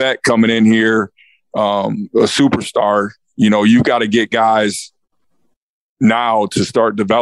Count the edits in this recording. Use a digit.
0